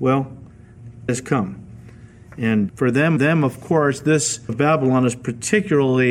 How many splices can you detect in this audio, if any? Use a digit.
4